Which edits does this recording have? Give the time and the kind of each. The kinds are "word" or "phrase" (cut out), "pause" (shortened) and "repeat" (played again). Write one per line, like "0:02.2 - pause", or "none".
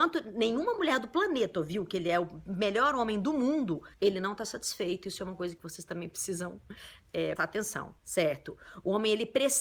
0:03.9 - pause
0:07.4 - word
0:08.0 - pause